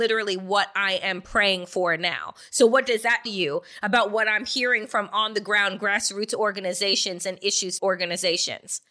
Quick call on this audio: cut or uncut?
cut